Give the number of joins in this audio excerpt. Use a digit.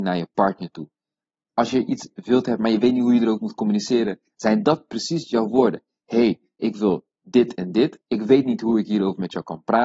1